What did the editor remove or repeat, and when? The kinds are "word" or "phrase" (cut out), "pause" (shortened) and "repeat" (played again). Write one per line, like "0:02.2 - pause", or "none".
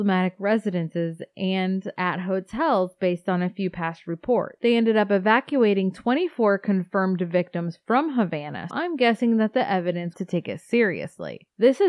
0:08.7 - word
0:10.1 - phrase